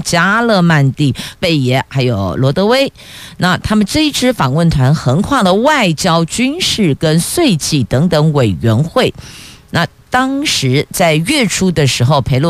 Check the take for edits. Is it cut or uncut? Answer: cut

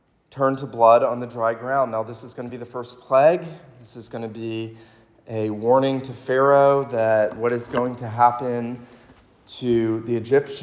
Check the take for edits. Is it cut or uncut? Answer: uncut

